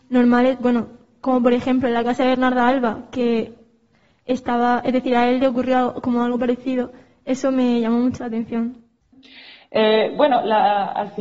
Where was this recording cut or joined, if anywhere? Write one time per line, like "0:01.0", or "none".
none

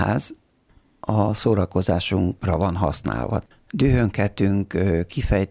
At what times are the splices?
0:03.5

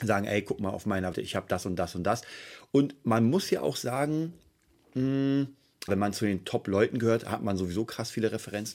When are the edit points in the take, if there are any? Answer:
0:01.1
0:05.9

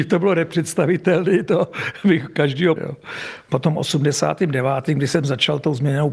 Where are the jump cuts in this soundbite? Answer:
0:02.8

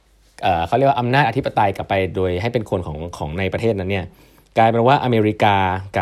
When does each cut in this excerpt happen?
none

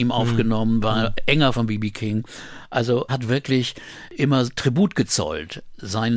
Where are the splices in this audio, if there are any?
0:01.5
0:03.1

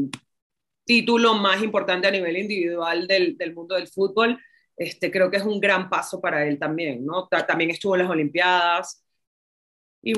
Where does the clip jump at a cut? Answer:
none

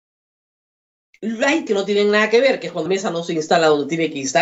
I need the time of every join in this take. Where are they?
0:01.7
0:02.9

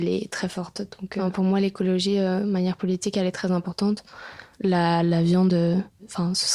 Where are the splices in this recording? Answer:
none

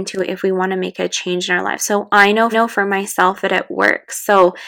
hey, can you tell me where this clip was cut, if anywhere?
0:02.5

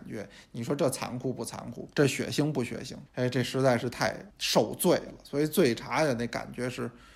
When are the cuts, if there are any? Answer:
0:01.9
0:03.1
0:04.3

